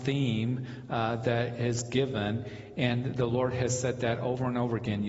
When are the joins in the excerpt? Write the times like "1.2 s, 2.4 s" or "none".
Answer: none